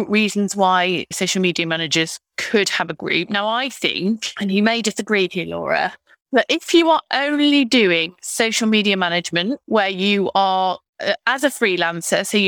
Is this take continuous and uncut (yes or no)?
yes